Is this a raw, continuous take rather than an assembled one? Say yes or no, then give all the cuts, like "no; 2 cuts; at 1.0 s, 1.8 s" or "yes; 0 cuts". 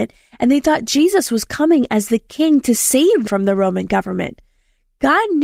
no; 1 cut; at 3.2 s